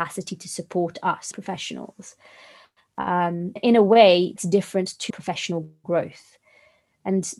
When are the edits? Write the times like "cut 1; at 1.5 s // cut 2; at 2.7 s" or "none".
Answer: cut 1; at 1.3 s // cut 2; at 3.6 s // cut 3; at 4.4 s // cut 4; at 5.1 s